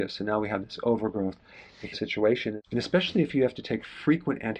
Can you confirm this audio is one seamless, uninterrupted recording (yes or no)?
no